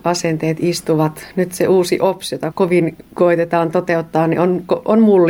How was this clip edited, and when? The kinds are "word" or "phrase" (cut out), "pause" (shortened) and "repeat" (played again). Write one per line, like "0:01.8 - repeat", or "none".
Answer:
0:02.5 - word
0:03.1 - pause